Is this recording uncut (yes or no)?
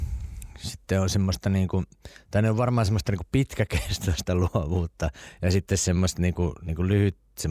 yes